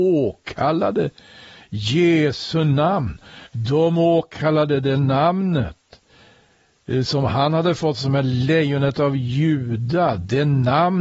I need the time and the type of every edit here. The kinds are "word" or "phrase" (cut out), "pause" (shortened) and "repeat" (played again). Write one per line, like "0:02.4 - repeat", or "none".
0:03.5 - pause